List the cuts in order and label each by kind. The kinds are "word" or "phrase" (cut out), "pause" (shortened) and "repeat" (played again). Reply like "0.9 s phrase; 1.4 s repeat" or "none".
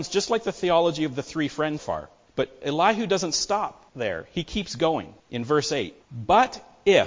1.8 s word; 2.3 s pause; 3.9 s pause; 5.2 s pause; 6.0 s pause